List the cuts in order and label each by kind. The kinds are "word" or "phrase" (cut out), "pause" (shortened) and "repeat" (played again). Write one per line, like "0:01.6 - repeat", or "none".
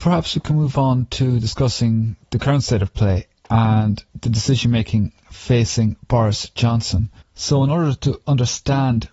0:07.2 - pause